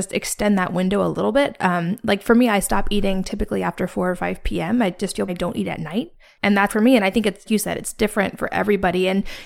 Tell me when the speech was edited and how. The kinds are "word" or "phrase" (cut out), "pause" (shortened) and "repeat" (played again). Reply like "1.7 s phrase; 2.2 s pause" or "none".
5.3 s phrase; 6.2 s pause; 6.7 s phrase; 7.5 s word

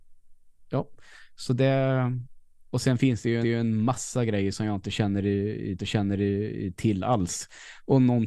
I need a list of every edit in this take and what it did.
2.7 s pause; 3.4 s repeat; 5.8 s repeat

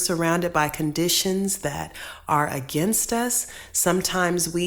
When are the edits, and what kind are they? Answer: none

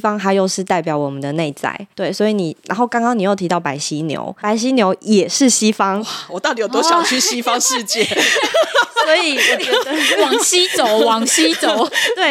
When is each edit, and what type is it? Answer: 1.9 s pause; 4.4 s word

